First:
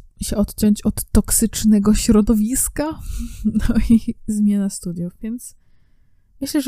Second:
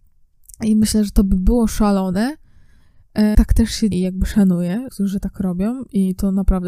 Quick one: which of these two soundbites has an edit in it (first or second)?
second